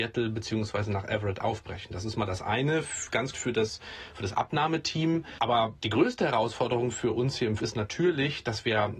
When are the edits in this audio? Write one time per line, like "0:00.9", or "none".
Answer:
0:03.3
0:07.6